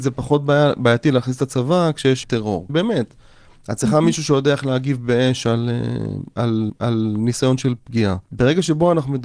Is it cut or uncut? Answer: cut